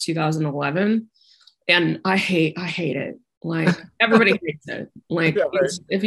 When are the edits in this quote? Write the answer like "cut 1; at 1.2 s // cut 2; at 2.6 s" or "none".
none